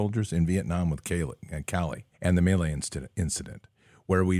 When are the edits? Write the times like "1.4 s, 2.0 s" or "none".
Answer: 2.1 s